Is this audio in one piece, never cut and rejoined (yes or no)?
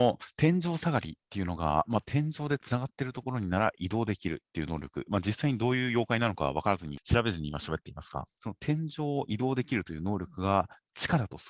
yes